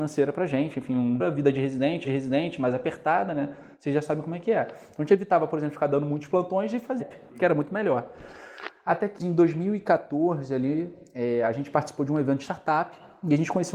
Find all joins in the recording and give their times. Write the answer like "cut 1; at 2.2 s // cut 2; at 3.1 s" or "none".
cut 1; at 1.2 s // cut 2; at 2.0 s // cut 3; at 7.0 s // cut 4; at 9.2 s